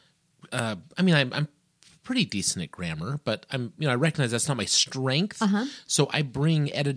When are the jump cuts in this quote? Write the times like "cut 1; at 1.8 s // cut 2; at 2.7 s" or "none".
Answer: none

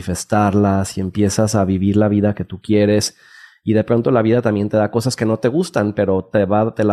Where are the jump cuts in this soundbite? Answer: none

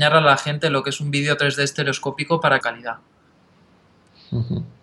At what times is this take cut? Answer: cut 1; at 2.6 s

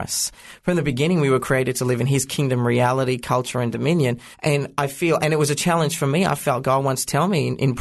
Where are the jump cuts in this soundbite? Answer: cut 1; at 4.3 s

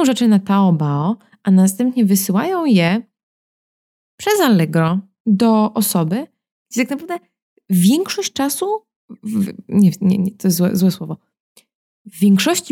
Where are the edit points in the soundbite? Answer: none

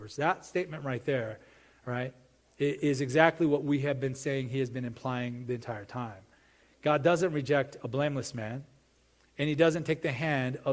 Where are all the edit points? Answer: none

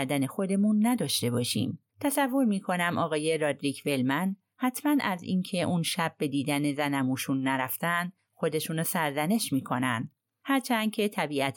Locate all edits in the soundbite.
cut 1; at 1.9 s

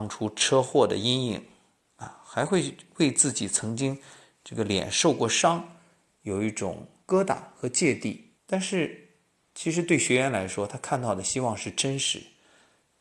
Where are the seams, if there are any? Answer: cut 1; at 8.4 s

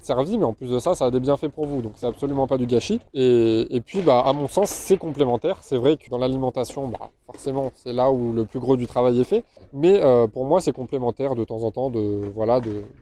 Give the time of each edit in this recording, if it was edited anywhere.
cut 1; at 3.1 s // cut 2; at 6.1 s // cut 3; at 9.6 s

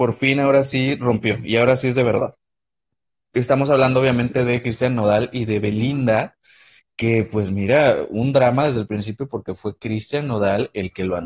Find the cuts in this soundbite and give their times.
none

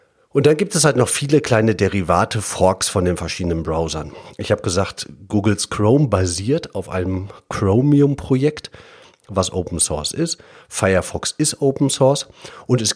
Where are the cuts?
none

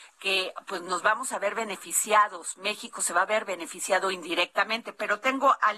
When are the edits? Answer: none

